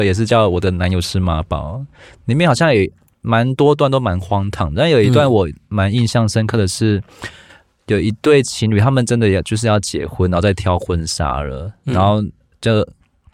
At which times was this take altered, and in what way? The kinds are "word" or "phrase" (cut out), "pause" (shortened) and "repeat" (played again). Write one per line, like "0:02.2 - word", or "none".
none